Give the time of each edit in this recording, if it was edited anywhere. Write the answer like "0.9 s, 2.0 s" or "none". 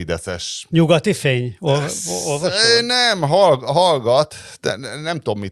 none